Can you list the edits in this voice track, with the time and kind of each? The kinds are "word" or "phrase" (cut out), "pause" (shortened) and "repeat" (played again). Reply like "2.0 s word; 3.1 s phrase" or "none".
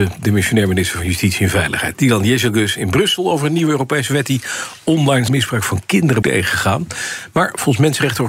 5.3 s word; 6.2 s word